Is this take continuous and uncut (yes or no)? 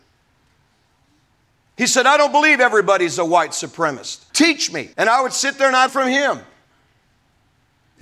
no